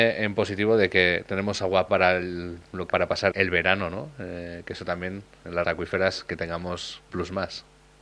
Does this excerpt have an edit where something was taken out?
yes; 5 cuts; at 1.9 s, 2.9 s, 3.3 s, 5.6 s, 7.1 s

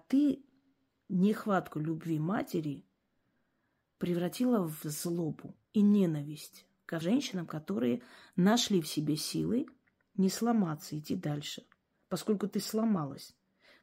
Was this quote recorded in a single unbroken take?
no; 3 cuts; at 4.8 s, 5.6 s, 7.0 s

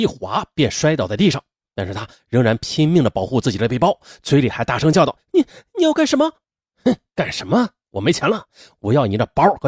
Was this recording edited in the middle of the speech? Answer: no; 0 cuts

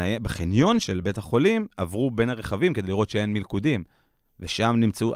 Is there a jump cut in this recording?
no; 0 cuts

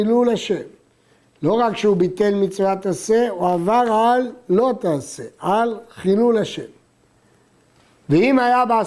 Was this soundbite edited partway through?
no; 0 cuts

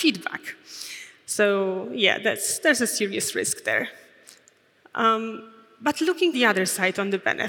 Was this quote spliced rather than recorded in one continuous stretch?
yes; 1 cut; at 6.3 s

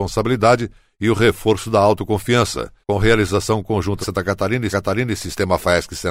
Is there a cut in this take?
yes; 3 cuts; at 2.8 s, 4.0 s, 4.7 s

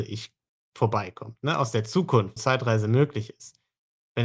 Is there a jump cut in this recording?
yes; 1 cut; at 2.4 s

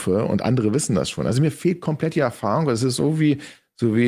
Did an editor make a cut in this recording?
no; 0 cuts

